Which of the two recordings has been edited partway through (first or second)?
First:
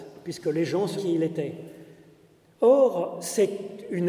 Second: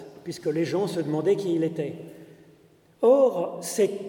first